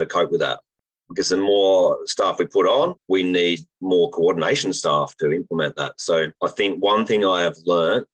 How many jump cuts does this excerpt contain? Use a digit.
3